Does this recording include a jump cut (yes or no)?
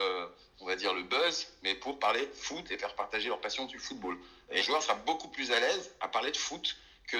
yes